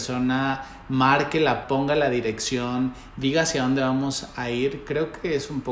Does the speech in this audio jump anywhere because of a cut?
yes; 1 cut; at 1.6 s

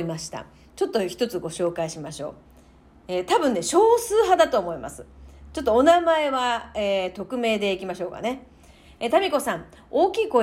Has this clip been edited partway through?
no; 0 cuts

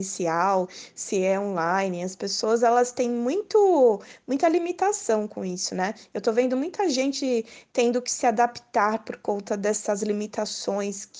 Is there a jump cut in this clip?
no; 0 cuts

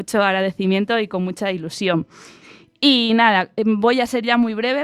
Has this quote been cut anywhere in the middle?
no; 0 cuts

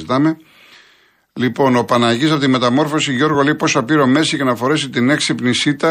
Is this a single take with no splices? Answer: yes; 0 cuts

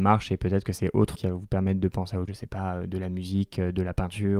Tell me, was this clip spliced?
yes; 2 cuts; at 1.1 s, 2.3 s

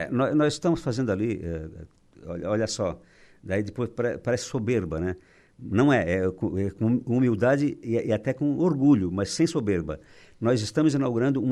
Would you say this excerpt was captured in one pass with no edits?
yes; 0 cuts

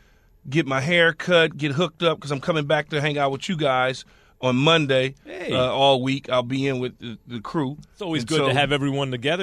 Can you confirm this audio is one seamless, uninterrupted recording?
yes; 0 cuts

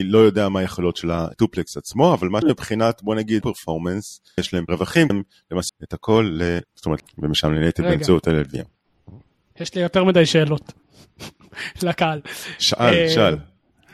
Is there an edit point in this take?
yes; 9 cuts; at 1.3 s, 2.4 s, 3.4 s, 4.4 s, 4.7 s, 5.1 s, 5.7 s, 6.6 s, 7.0 s

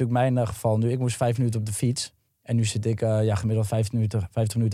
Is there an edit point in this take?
no; 0 cuts

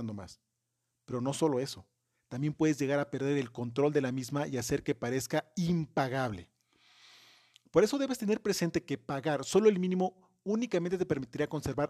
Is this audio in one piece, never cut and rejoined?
yes; 0 cuts

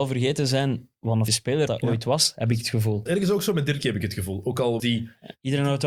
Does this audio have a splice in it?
yes; 5 cuts; at 1.3 s, 1.7 s, 3.1 s, 3.8 s, 4.8 s

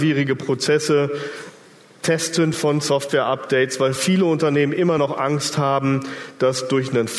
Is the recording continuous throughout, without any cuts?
yes; 0 cuts

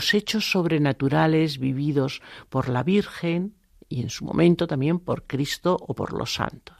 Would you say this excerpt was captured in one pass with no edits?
yes; 0 cuts

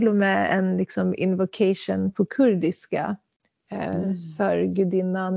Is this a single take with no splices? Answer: yes; 0 cuts

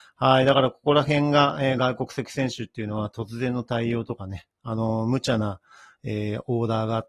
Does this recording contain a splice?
no; 0 cuts

